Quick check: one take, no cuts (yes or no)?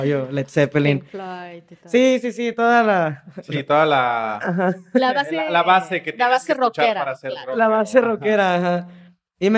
yes